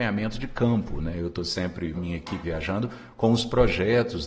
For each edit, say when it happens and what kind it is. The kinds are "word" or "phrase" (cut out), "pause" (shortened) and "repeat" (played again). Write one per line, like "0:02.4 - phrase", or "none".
0:01.9 - phrase
0:02.4 - word